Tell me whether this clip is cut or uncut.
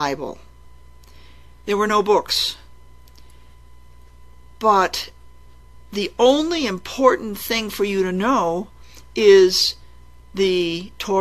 uncut